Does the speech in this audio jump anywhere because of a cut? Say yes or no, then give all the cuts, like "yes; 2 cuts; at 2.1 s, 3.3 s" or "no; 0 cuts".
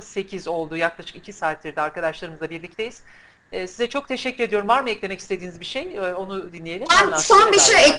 no; 0 cuts